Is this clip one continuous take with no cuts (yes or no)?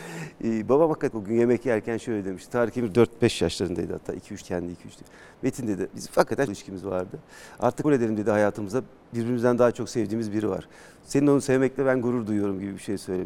no